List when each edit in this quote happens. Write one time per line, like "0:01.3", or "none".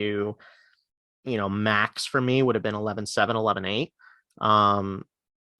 none